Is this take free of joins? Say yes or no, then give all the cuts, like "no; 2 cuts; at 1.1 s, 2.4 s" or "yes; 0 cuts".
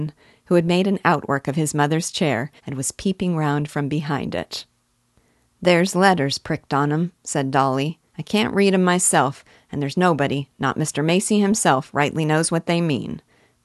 no; 2 cuts; at 2.6 s, 8.1 s